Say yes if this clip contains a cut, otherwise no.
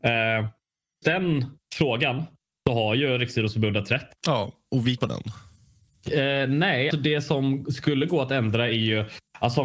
yes